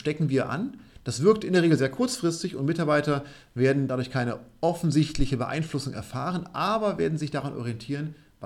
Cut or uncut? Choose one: uncut